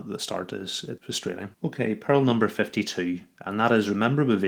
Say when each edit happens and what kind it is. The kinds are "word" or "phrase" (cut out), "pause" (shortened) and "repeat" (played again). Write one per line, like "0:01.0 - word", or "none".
0:01.0 - word
0:01.5 - pause